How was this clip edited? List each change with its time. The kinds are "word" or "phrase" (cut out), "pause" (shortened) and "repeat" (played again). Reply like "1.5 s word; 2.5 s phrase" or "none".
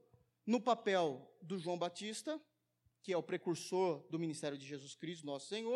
none